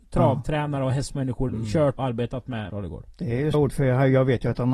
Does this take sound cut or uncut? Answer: cut